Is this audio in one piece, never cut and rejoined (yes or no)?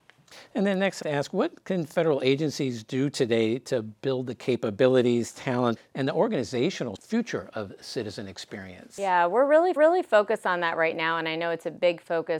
no